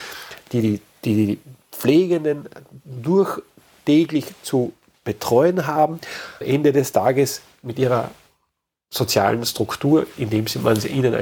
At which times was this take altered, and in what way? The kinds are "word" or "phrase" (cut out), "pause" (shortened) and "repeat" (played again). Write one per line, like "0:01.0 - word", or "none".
0:06.4 - word